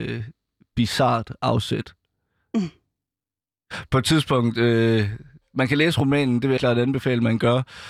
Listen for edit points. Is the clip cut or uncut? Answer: cut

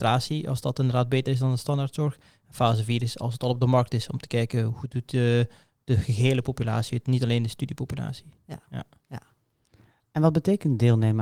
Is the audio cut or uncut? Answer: uncut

